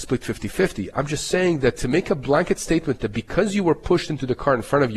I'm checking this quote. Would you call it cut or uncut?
uncut